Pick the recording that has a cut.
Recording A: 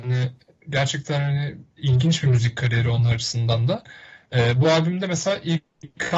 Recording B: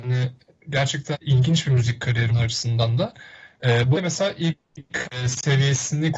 B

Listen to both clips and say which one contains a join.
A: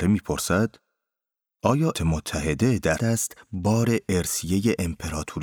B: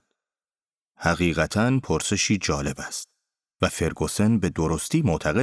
A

